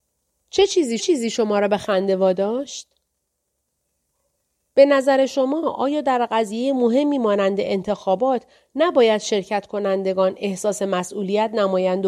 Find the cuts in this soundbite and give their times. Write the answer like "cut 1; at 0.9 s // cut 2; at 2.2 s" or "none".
cut 1; at 1.0 s